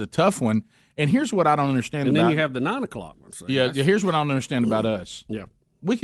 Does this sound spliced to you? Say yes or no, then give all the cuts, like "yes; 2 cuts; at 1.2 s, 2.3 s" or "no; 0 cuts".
no; 0 cuts